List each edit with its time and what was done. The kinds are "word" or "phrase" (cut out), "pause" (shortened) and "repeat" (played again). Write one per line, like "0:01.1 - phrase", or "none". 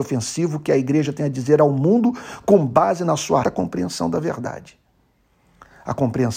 0:03.4 - word